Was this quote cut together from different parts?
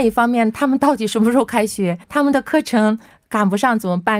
yes; 1 cut; at 2.0 s

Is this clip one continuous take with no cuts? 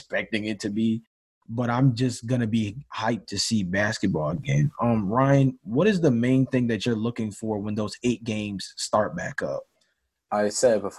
yes; 0 cuts

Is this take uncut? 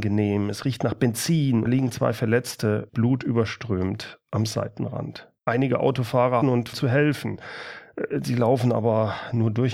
no; 5 cuts; at 1.7 s, 2.9 s, 5.4 s, 6.4 s, 6.7 s

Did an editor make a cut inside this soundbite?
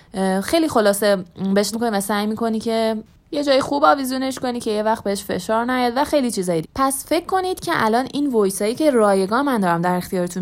yes; 2 cuts; at 1.7 s, 6.6 s

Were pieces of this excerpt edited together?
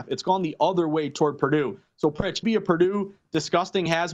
yes; 1 cut; at 2.4 s

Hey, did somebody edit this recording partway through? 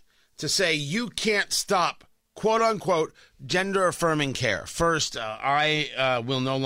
no; 0 cuts

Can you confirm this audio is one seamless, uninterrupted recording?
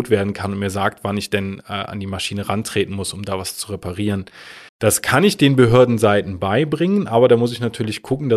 no; 1 cut; at 4.7 s

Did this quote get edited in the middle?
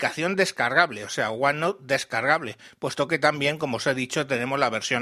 no; 0 cuts

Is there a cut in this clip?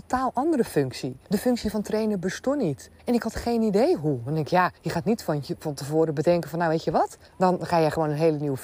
yes; 4 cuts; at 1.2 s, 3.0 s, 4.8 s, 7.3 s

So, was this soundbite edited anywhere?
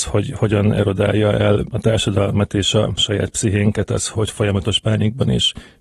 no; 0 cuts

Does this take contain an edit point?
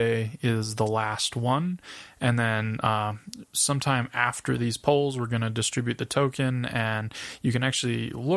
no; 0 cuts

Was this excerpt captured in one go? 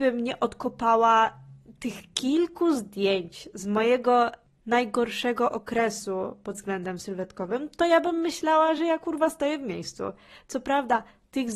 yes; 0 cuts

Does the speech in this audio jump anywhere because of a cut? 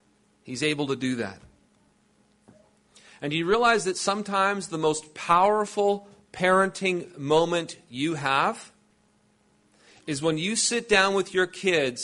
no; 0 cuts

